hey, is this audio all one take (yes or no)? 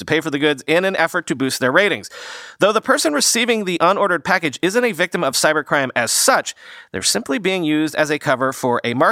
yes